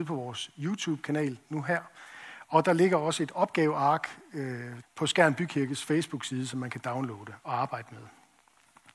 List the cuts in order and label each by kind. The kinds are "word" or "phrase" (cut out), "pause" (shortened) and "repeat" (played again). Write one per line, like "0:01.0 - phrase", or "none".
0:04.8 - phrase